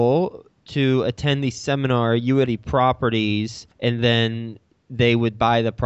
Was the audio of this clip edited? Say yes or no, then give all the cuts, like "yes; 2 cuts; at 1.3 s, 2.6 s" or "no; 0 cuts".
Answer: yes; 2 cuts; at 2.5 s, 3.7 s